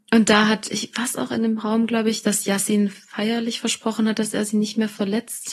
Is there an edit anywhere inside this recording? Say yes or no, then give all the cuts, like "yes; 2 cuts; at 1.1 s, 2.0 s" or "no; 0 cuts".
no; 0 cuts